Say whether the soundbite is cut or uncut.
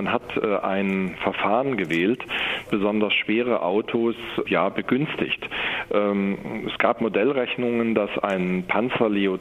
cut